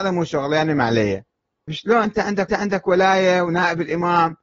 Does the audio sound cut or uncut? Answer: cut